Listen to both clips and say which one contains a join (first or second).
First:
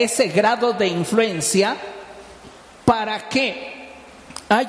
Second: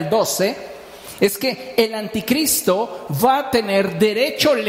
first